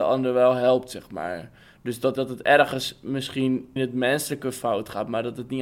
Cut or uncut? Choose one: cut